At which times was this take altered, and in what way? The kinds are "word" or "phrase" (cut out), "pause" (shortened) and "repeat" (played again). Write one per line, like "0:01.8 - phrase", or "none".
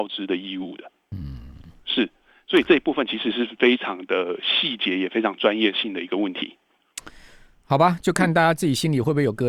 none